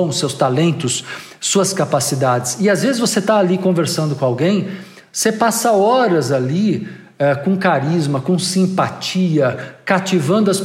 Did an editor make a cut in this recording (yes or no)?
no